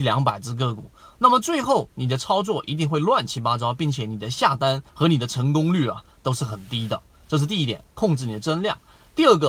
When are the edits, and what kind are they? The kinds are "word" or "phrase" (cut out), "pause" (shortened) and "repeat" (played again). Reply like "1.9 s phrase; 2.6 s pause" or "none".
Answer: 4.9 s pause